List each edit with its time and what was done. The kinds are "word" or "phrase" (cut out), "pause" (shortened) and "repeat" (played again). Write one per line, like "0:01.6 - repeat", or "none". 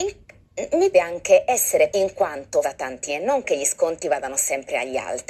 0:00.9 - word
0:01.9 - word
0:02.6 - phrase
0:03.1 - word